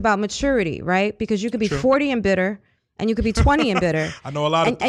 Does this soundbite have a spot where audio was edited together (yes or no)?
no